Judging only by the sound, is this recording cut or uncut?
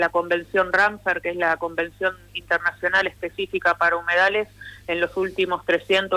uncut